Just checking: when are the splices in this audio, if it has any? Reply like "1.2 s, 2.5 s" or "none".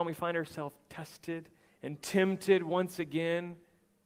1.7 s